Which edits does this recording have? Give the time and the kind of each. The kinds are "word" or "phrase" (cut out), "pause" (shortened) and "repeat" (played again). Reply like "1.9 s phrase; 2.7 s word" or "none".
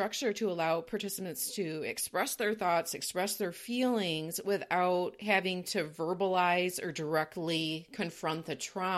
none